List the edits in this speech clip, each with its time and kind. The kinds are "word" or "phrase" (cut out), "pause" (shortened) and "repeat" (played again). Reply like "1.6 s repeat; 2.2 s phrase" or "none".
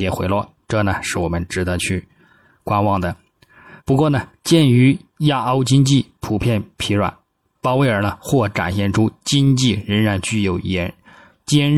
3.8 s pause

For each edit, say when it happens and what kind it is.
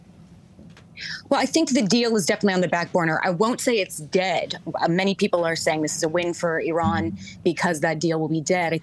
none

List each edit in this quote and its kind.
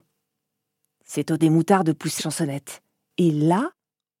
1.4 s word; 2.2 s word

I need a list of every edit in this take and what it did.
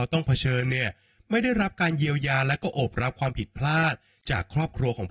none

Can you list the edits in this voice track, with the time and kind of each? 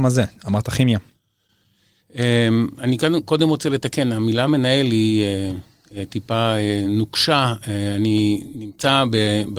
none

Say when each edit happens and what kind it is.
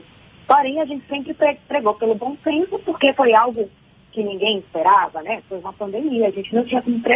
none

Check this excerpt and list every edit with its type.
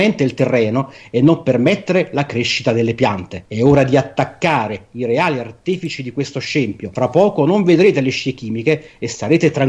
none

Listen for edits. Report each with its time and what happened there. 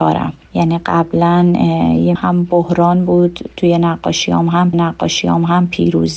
2.2 s word; 4.7 s repeat

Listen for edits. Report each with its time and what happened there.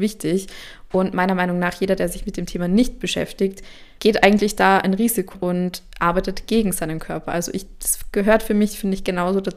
4.0 s word; 5.3 s word

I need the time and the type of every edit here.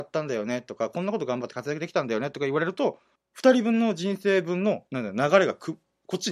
3.2 s pause; 4.9 s pause

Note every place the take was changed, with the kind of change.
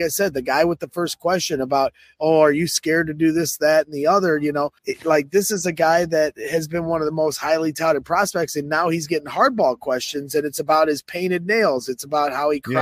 4.8 s pause

